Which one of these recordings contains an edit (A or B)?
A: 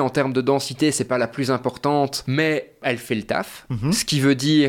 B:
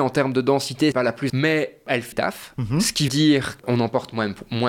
B